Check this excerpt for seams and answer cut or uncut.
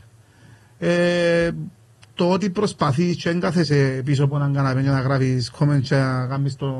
uncut